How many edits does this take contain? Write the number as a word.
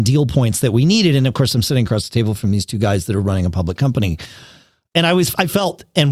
zero